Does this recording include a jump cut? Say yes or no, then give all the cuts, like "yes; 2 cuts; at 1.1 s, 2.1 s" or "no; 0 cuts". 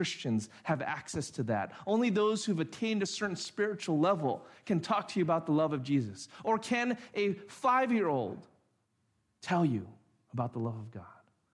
no; 0 cuts